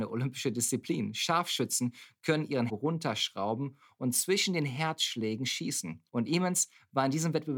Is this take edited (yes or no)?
yes